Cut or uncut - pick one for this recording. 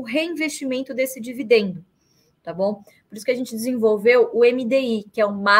uncut